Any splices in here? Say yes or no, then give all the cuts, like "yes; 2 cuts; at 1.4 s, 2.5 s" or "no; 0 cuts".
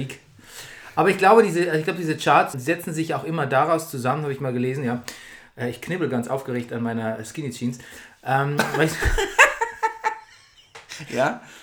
yes; 1 cut; at 2.5 s